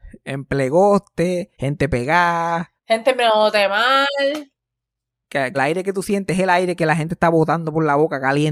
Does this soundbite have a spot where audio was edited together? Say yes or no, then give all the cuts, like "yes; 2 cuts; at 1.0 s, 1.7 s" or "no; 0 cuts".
yes; 3 cuts; at 1.5 s, 2.8 s, 5.5 s